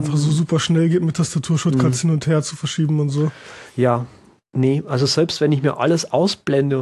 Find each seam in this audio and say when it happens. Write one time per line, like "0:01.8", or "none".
none